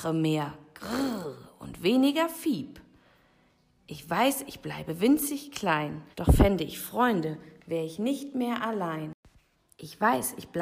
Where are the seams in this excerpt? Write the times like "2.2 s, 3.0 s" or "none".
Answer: 6.1 s